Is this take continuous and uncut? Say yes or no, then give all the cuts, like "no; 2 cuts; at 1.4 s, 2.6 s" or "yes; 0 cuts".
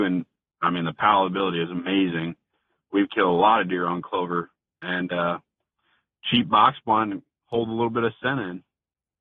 yes; 0 cuts